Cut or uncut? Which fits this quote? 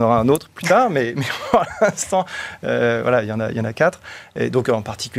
uncut